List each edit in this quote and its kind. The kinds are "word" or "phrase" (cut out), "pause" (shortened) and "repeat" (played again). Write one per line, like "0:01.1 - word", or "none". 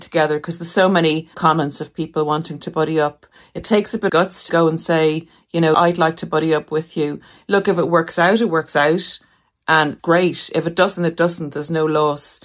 0:01.3 - word
0:04.1 - word
0:04.5 - word
0:05.7 - word
0:10.0 - word